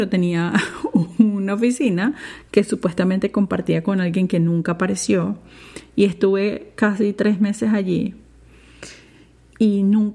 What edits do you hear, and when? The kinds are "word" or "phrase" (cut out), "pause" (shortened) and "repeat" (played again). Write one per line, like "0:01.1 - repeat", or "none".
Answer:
none